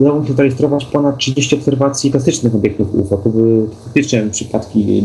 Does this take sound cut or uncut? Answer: cut